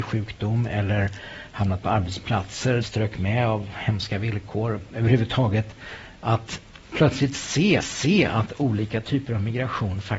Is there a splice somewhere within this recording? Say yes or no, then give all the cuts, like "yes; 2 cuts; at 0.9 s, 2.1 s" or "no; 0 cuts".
yes; 2 cuts; at 2.8 s, 7.8 s